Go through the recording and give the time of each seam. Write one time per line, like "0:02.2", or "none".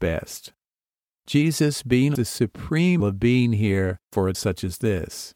0:02.1
0:03.0
0:04.0
0:04.3